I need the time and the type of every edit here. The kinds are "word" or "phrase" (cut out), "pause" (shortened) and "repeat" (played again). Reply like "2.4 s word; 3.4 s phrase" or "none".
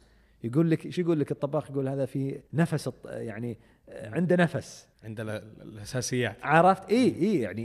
2.5 s pause; 4.9 s pause